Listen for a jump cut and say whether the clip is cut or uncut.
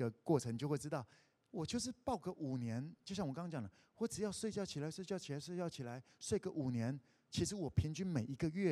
uncut